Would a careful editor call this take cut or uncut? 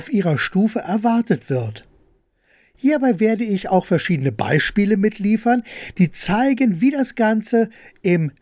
uncut